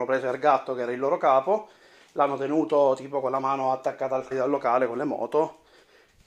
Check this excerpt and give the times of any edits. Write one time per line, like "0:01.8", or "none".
0:04.3